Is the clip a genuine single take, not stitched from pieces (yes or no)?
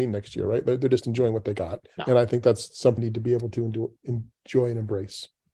no